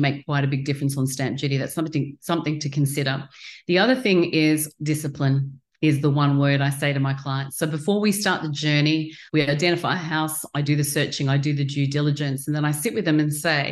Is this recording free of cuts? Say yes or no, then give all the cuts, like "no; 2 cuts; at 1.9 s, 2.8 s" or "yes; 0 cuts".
no; 1 cut; at 9.3 s